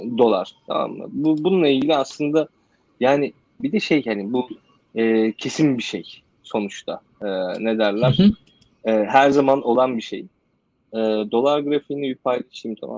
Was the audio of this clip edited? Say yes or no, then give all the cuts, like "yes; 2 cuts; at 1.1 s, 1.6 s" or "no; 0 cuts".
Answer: no; 0 cuts